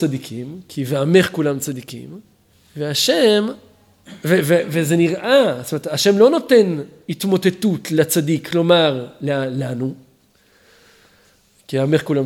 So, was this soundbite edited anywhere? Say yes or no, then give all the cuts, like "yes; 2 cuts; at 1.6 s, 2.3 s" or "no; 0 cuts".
yes; 1 cut; at 2.5 s